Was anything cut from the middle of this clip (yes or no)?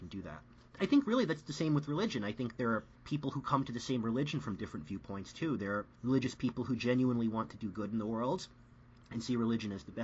yes